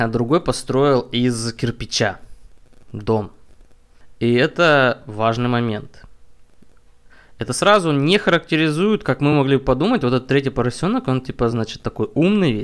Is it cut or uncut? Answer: uncut